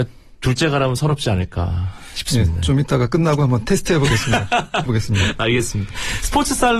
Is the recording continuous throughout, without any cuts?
no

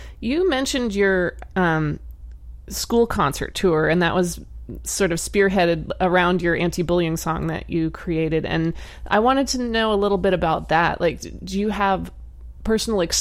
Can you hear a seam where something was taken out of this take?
no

